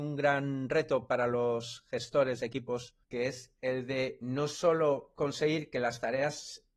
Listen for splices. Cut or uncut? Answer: cut